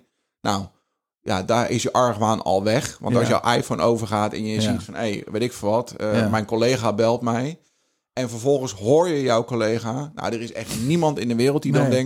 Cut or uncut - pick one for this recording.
uncut